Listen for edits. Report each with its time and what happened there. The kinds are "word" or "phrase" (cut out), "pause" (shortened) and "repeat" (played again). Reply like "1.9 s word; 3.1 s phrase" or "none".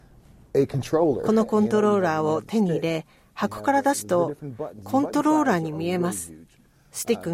none